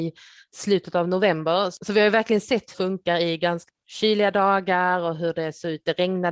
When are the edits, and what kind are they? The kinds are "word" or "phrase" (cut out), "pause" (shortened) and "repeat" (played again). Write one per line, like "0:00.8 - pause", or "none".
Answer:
0:02.7 - phrase
0:03.7 - word